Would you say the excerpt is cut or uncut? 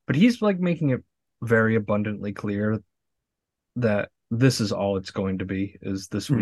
uncut